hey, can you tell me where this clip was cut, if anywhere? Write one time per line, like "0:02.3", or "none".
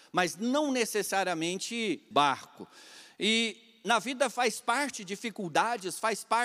0:02.1